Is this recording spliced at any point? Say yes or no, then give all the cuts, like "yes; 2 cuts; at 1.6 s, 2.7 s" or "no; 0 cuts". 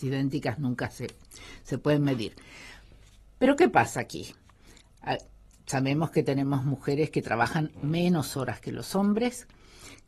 no; 0 cuts